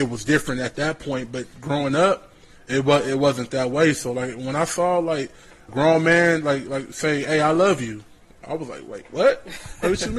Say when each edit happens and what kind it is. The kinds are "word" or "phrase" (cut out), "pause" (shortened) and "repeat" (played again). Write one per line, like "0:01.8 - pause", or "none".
0:05.7 - word